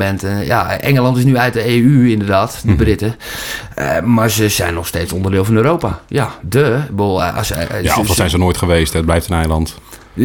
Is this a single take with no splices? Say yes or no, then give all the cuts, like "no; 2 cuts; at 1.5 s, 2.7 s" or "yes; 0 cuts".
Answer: yes; 0 cuts